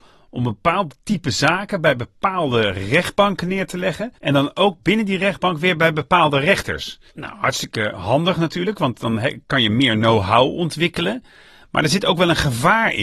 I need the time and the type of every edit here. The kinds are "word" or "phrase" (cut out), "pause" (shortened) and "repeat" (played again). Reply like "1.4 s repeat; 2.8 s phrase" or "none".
4.2 s pause; 7.1 s pause